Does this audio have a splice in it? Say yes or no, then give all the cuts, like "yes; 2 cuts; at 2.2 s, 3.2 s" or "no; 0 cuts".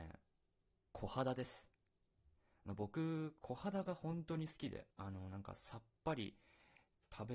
yes; 1 cut; at 4.9 s